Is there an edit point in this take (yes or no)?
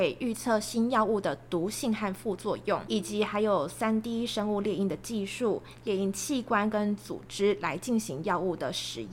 yes